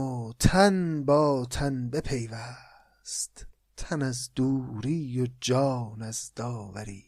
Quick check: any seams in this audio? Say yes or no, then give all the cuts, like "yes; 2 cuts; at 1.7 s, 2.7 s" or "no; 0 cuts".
yes; 1 cut; at 3.5 s